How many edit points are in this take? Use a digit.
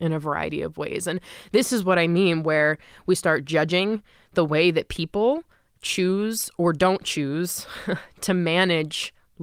0